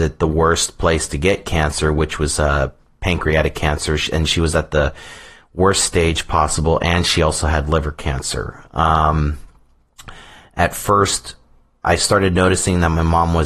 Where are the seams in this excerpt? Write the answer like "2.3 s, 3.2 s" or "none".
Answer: none